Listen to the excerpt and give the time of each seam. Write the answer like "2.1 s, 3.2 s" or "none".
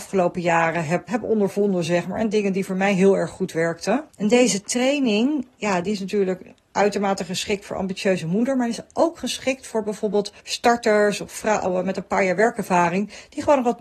1.1 s, 4.1 s, 10.4 s